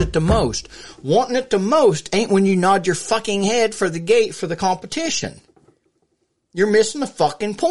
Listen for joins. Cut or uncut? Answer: uncut